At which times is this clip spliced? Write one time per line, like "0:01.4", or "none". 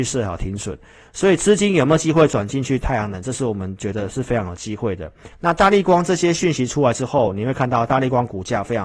0:05.3